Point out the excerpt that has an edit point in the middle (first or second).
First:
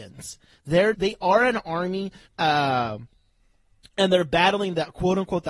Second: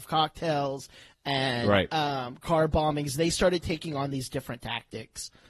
first